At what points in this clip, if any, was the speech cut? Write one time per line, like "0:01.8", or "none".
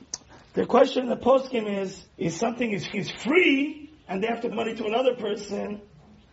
0:02.1
0:02.9
0:04.5